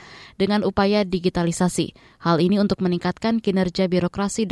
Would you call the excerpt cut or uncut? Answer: uncut